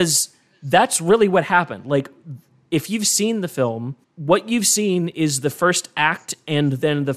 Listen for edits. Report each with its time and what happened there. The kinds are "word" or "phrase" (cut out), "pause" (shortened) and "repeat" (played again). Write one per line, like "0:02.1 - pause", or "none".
0:04.0 - pause